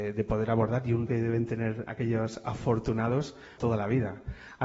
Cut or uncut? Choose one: cut